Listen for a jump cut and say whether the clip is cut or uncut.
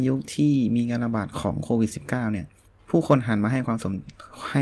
cut